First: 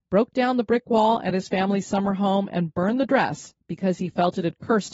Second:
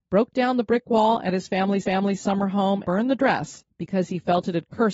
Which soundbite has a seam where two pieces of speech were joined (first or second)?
second